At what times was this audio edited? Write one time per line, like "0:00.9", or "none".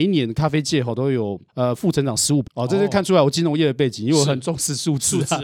0:01.5
0:02.4